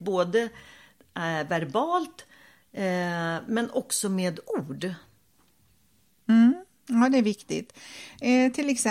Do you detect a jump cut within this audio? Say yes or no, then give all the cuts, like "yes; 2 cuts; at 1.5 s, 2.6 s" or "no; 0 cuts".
no; 0 cuts